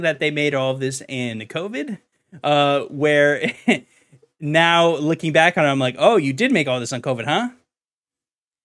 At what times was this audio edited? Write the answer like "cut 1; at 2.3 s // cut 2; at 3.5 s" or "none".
none